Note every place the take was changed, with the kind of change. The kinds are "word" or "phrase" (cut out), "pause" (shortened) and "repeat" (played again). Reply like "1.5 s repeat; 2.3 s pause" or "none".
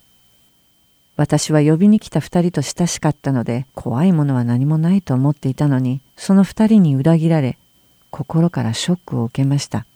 3.7 s pause; 6.1 s pause